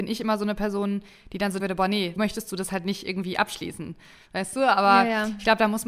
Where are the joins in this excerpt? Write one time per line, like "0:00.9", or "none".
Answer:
0:01.6
0:02.2